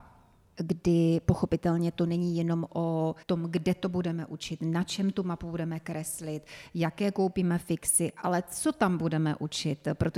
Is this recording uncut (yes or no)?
no